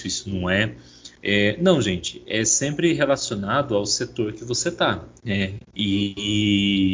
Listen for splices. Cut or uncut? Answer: cut